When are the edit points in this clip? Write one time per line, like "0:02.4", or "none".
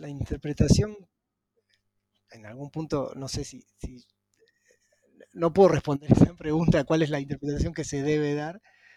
none